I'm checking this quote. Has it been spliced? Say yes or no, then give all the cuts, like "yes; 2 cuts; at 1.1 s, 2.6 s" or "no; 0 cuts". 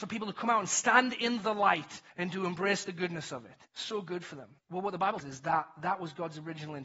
yes; 4 cuts; at 2.1 s, 3.7 s, 4.6 s, 5.2 s